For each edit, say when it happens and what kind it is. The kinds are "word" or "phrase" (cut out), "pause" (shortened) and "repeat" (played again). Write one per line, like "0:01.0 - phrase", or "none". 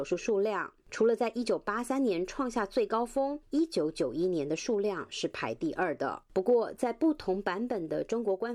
0:03.4 - pause